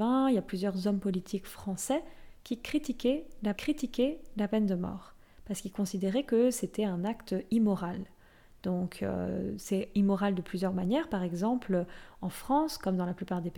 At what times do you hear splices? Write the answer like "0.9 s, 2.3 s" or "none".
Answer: 3.5 s